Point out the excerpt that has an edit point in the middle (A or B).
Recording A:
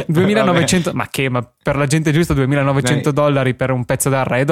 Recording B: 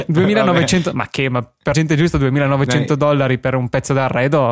B